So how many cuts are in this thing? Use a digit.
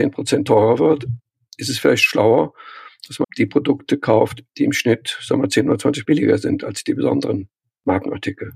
3